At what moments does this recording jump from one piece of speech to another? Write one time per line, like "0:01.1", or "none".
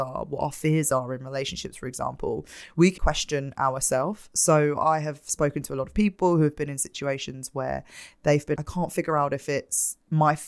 0:03.0
0:08.6